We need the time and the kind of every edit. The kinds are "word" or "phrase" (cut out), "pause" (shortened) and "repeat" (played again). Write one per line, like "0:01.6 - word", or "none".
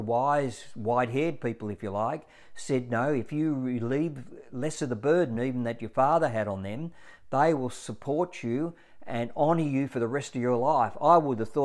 none